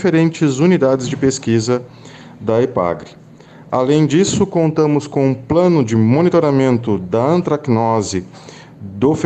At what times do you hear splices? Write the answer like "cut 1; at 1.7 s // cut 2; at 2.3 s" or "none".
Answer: none

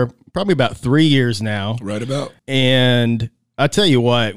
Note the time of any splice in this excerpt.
cut 1; at 2.4 s

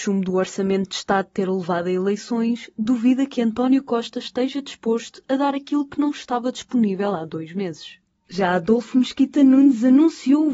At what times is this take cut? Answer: none

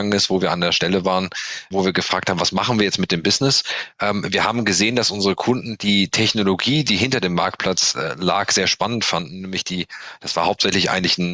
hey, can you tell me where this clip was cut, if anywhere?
cut 1; at 1.7 s

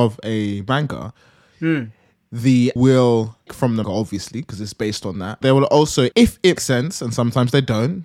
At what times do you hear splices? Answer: cut 1; at 2.8 s // cut 2; at 3.5 s // cut 3; at 3.8 s // cut 4; at 5.4 s // cut 5; at 6.1 s // cut 6; at 6.6 s

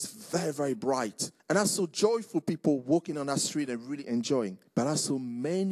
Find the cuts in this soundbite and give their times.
cut 1; at 1.4 s // cut 2; at 4.7 s

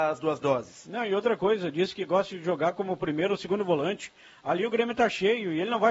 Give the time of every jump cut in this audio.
none

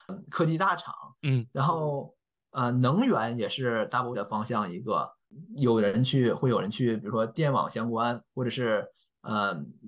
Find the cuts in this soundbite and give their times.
cut 1; at 1.1 s // cut 2; at 4.1 s

